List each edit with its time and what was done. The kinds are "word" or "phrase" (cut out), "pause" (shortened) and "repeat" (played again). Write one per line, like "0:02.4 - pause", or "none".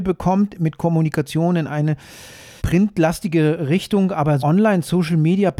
0:02.6 - word
0:04.4 - word